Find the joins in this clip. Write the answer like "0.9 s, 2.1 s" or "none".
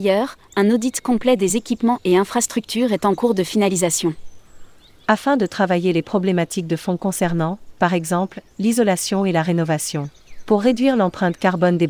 none